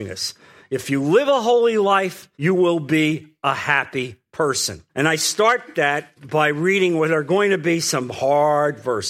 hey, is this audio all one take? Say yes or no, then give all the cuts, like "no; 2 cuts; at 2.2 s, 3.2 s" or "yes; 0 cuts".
no; 3 cuts; at 2.3 s, 4.9 s, 6.2 s